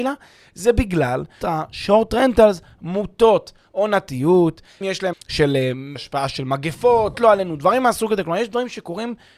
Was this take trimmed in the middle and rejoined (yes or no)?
yes